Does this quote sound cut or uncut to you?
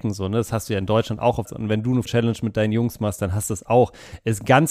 cut